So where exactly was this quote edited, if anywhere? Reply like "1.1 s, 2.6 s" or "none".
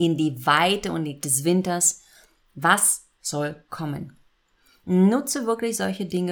1.2 s